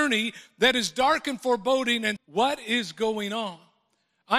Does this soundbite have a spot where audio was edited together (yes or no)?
yes